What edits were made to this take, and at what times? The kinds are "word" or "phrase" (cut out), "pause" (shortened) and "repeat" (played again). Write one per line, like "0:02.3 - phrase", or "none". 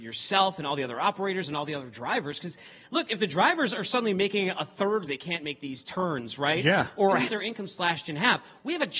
0:05.1 - phrase
0:07.3 - word